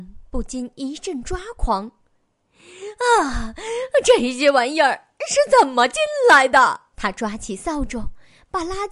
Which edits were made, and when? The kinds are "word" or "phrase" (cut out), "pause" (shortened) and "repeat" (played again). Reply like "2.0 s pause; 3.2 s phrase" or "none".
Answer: 6.9 s pause